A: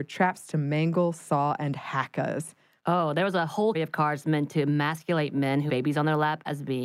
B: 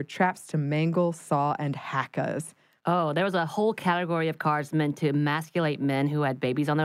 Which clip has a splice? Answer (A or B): A